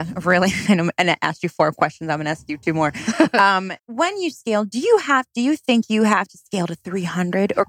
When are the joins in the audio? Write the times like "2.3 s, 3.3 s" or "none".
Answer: 3.8 s